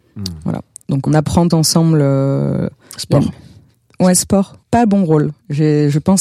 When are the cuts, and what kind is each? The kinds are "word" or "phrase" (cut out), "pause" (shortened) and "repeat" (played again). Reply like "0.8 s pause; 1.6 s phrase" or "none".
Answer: 1.1 s word; 1.5 s word; 4.6 s pause